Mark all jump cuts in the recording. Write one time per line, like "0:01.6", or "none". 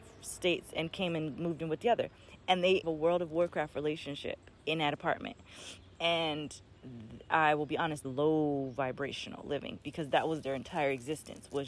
0:02.8
0:04.6
0:08.0